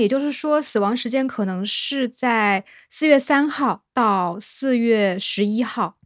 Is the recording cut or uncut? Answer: uncut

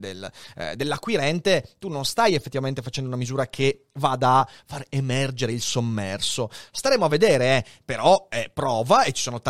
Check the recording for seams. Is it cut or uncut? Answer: uncut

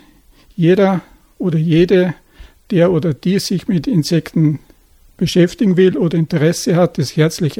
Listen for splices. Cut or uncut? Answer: uncut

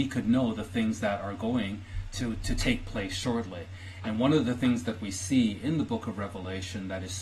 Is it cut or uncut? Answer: uncut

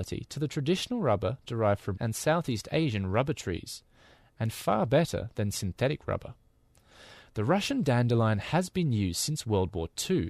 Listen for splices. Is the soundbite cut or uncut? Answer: cut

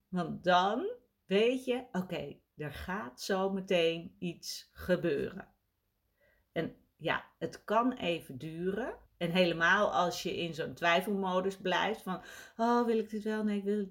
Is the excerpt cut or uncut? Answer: cut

